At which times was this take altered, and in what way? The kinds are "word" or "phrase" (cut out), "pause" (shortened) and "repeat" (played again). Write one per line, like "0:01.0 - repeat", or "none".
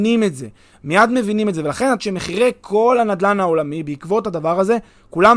0:02.0 - phrase